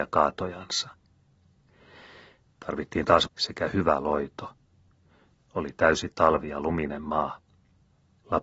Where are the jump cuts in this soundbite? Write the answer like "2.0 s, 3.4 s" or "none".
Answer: 3.3 s